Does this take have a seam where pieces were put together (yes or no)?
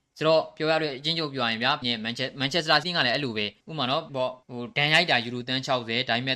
yes